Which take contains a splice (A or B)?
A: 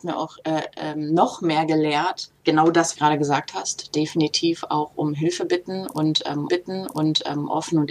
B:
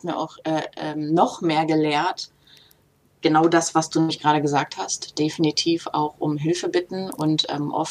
A